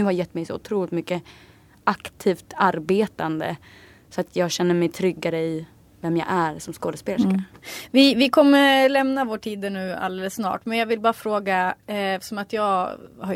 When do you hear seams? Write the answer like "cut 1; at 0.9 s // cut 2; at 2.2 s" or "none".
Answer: none